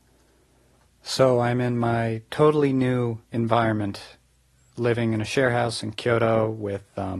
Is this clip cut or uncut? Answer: cut